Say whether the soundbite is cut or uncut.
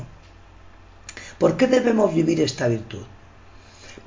uncut